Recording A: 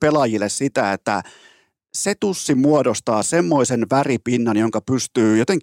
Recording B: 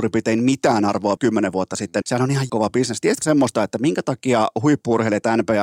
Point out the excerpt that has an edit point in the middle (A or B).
B